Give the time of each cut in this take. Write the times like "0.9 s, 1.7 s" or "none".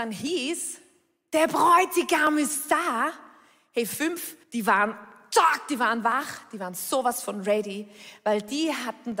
4.4 s